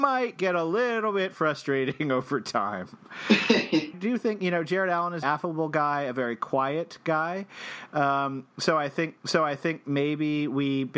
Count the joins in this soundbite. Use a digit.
3